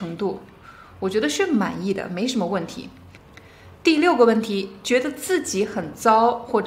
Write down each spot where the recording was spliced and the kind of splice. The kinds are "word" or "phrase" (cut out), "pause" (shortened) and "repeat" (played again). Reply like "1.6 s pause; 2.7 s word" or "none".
3.8 s pause